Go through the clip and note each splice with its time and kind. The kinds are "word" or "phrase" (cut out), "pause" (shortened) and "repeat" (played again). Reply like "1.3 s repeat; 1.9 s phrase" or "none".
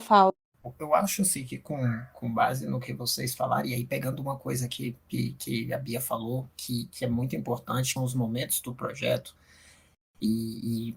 8.0 s phrase